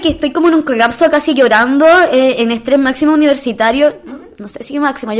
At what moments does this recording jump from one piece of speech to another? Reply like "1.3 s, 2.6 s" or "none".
none